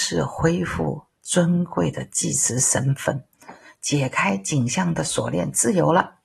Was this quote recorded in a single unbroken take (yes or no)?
yes